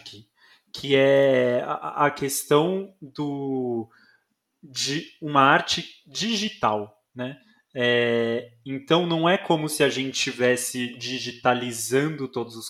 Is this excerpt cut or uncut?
uncut